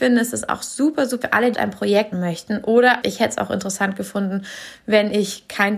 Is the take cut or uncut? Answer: cut